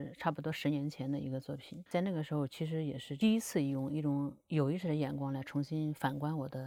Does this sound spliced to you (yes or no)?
yes